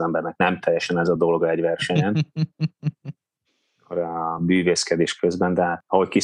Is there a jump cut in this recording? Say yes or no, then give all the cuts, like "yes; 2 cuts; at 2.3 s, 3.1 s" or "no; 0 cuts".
no; 0 cuts